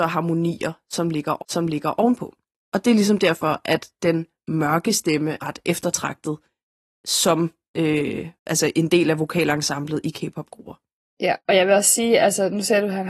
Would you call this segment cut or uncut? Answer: cut